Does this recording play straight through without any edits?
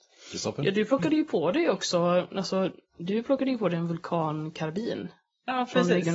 yes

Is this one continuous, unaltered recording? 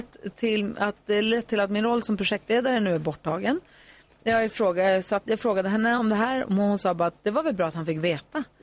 yes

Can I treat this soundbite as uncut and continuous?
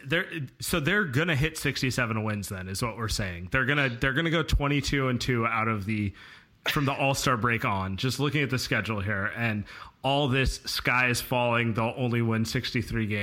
yes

